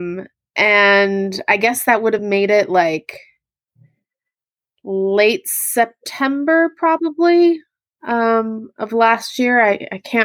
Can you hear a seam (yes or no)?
no